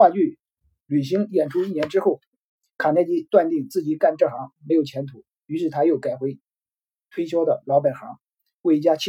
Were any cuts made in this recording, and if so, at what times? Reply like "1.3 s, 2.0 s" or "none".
none